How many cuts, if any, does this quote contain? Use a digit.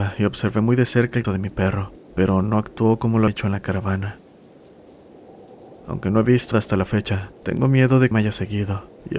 6